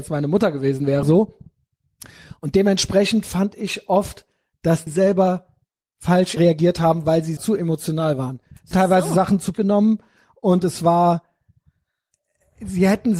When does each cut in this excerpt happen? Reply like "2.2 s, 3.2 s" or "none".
1.0 s, 4.9 s, 6.4 s, 7.4 s, 8.7 s, 9.5 s